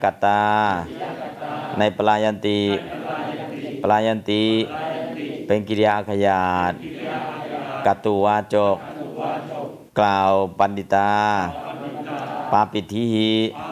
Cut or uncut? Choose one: cut